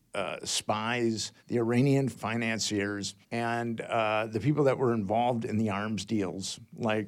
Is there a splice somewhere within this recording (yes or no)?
yes